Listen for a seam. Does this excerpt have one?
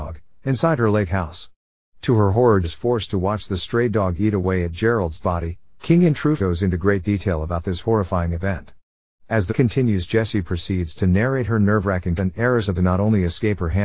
yes; 6 cuts; at 2.6 s, 5.2 s, 6.4 s, 9.5 s, 12.2 s, 12.7 s

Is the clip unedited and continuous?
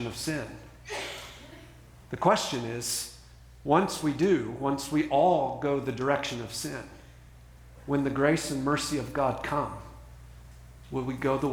yes; 0 cuts

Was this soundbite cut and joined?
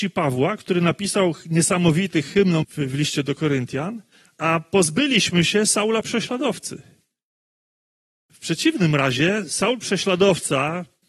yes; 1 cut; at 2.6 s

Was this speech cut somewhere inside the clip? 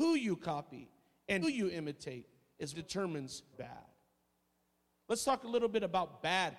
yes; 3 cuts; at 1.4 s, 2.7 s, 3.5 s

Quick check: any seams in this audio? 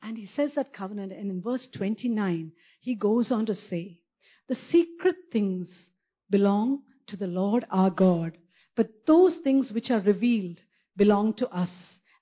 no; 0 cuts

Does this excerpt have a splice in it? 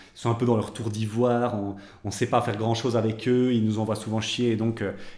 no; 0 cuts

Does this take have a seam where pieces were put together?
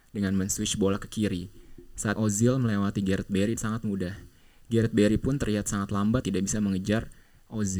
yes; 3 cuts; at 2.2 s, 3.6 s, 6.2 s

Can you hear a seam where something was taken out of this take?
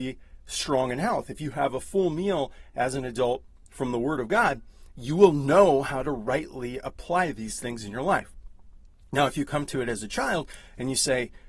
no; 0 cuts

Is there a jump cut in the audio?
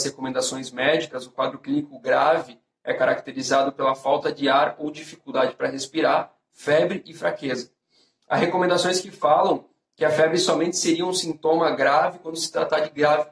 no; 0 cuts

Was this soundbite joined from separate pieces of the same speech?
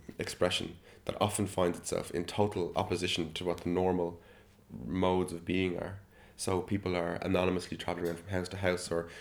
no; 0 cuts

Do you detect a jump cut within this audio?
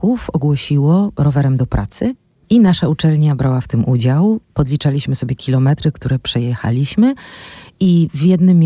no; 0 cuts

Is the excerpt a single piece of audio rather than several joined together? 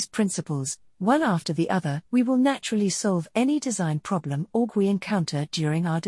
no; 2 cuts; at 2.0 s, 4.7 s

